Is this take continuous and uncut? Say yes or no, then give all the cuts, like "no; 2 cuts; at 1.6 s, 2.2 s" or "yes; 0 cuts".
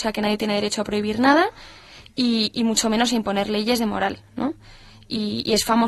yes; 0 cuts